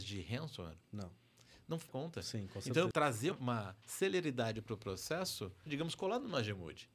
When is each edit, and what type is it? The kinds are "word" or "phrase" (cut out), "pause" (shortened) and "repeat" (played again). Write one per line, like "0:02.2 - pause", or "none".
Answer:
0:01.9 - phrase
0:02.9 - word
0:03.3 - word
0:05.7 - phrase